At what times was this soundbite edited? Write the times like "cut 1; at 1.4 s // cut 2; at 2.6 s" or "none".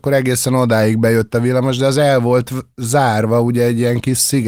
none